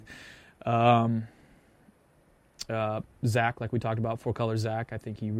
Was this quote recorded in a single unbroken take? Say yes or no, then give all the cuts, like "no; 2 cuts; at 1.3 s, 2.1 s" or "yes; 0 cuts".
yes; 0 cuts